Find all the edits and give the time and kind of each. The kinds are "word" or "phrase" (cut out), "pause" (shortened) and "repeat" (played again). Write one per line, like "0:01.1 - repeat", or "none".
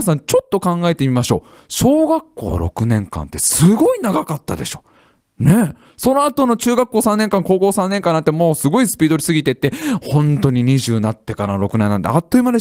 none